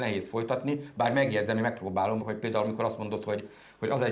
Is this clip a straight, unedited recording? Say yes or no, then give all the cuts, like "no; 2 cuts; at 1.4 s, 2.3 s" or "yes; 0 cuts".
no; 1 cut; at 2.2 s